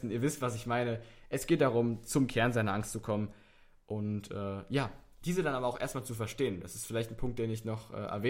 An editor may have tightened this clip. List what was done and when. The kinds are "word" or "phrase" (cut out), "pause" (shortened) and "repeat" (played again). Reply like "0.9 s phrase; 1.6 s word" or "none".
none